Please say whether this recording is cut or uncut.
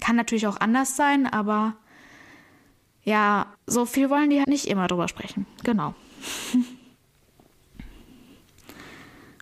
cut